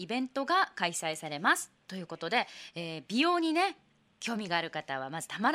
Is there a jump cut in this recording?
no; 0 cuts

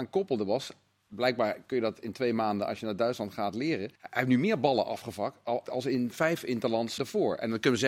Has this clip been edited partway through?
yes; 3 cuts; at 4.0 s, 5.6 s, 7.0 s

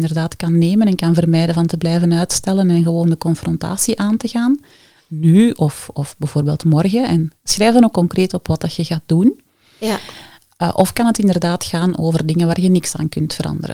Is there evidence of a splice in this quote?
no; 0 cuts

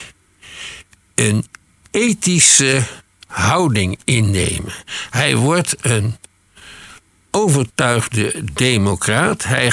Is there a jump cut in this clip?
no; 0 cuts

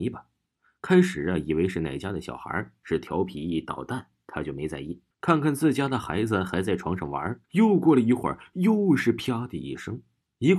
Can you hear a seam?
yes; 2 cuts; at 5.1 s, 7.4 s

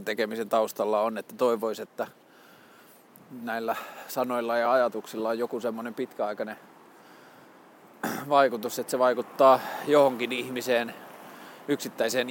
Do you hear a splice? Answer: no; 0 cuts

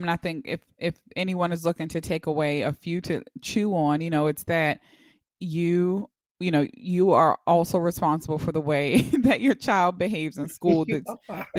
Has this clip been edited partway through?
no; 0 cuts

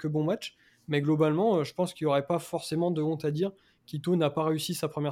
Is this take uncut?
yes; 0 cuts

